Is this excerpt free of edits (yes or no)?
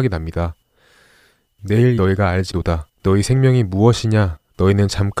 no